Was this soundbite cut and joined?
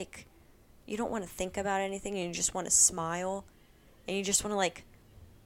no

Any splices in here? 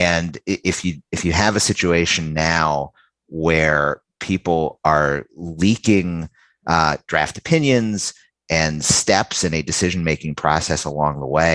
no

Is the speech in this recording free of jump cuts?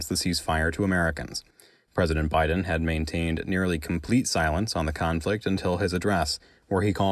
yes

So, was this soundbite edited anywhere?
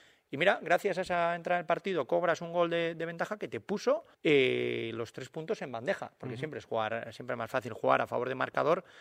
yes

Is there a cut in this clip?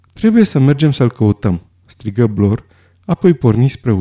no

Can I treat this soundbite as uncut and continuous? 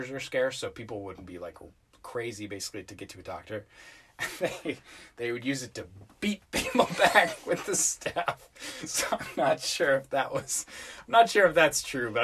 yes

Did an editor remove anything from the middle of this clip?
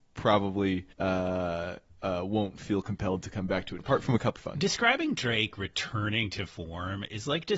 yes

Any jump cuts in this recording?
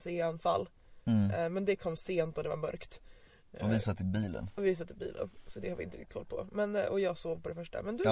no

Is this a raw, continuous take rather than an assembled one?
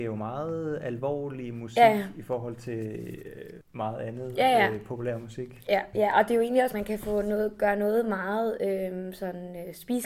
no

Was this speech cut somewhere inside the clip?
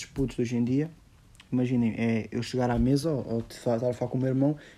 no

